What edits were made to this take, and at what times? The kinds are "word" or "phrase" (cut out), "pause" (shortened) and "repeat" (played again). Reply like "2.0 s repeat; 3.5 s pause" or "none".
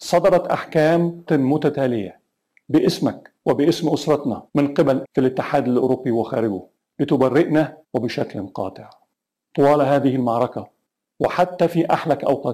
1.3 s word; 3.4 s pause; 4.5 s pause; 5.0 s phrase; 7.8 s pause

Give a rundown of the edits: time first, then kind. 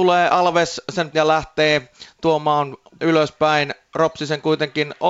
1.1 s word; 3.0 s word

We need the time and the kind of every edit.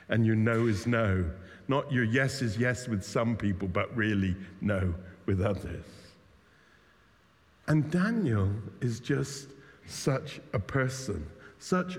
none

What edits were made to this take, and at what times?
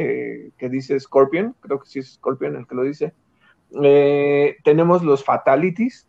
none

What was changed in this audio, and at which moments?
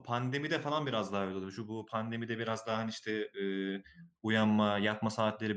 none

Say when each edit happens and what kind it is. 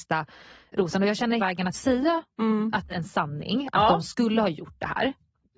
1.4 s word; 1.7 s phrase; 2.9 s phrase

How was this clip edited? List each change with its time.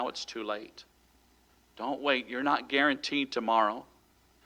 none

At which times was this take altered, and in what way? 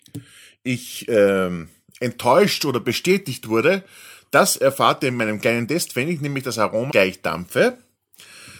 6.9 s word

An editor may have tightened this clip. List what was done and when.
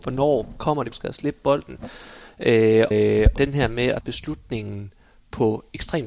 0.9 s word; 2.9 s word; 3.4 s word; 4.0 s word

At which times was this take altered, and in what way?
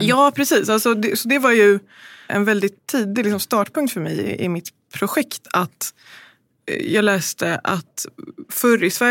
2.8 s pause

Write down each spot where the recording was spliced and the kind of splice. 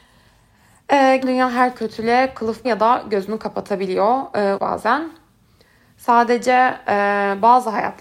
1.2 s word; 1.7 s word; 2.6 s word; 4.6 s word

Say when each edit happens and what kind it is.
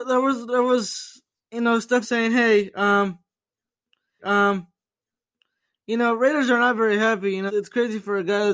2.0 s phrase; 4.2 s repeat; 7.5 s word

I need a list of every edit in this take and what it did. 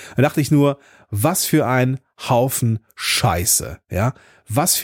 none

